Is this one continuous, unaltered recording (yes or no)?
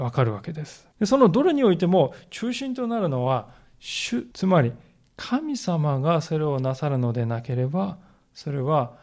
no